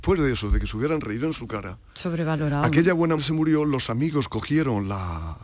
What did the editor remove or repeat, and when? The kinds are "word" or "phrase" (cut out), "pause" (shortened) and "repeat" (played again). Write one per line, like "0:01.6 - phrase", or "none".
0:03.2 - word